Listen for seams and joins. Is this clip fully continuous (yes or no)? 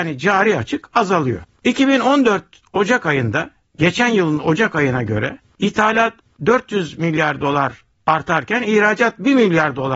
yes